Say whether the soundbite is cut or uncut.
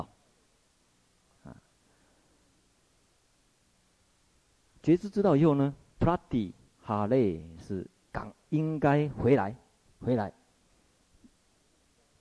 uncut